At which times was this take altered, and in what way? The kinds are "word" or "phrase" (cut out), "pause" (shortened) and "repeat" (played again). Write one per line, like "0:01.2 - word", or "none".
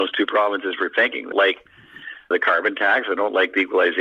0:01.3 - word
0:02.3 - word